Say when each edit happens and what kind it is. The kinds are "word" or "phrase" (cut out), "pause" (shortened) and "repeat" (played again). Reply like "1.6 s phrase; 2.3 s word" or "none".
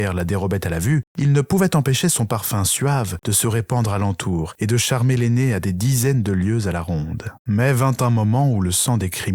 7.4 s pause